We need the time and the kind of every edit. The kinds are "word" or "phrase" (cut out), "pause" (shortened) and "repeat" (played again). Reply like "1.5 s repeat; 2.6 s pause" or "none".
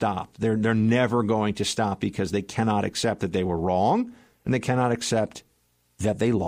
none